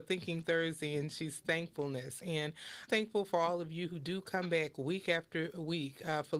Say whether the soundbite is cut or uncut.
cut